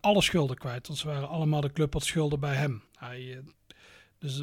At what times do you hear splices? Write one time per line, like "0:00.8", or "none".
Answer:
0:02.9

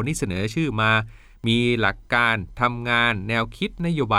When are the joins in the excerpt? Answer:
none

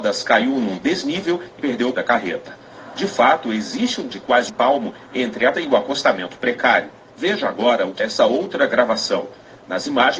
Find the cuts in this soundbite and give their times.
0:01.6
0:01.9
0:04.1
0:04.5
0:05.5
0:07.1
0:08.0

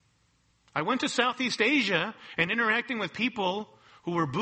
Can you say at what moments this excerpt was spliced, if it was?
none

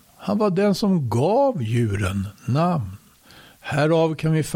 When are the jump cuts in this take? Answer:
none

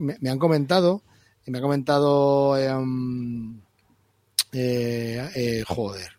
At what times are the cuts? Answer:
none

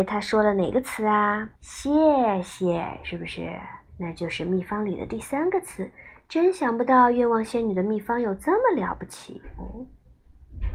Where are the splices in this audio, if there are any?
0:01.5
0:03.9

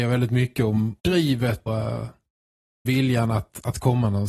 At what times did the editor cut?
0:01.0
0:01.7
0:02.9

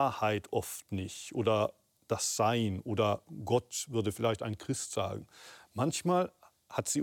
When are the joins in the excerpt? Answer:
none

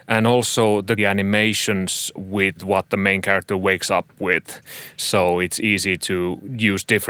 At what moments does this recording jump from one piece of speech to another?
0:01.0

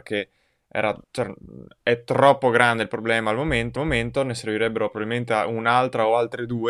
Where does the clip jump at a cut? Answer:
0:01.0
0:03.8

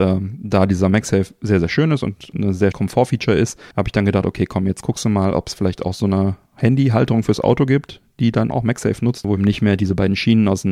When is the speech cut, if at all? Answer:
0:02.3
0:02.7
0:03.7
0:06.5
0:08.5
0:09.4

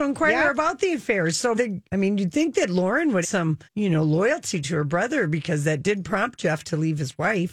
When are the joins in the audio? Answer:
0:01.5
0:01.9
0:03.2
0:03.7

